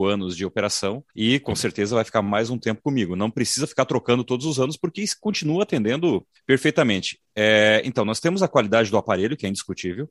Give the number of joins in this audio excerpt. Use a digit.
2